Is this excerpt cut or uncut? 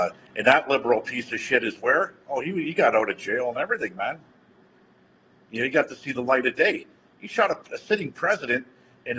uncut